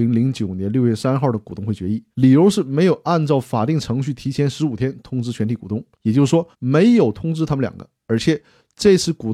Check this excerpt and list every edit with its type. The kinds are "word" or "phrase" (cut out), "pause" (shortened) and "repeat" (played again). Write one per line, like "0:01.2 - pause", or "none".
0:02.1 - pause
0:05.9 - pause
0:06.5 - pause